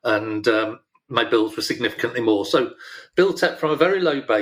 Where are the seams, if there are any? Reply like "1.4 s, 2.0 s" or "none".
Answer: 0.9 s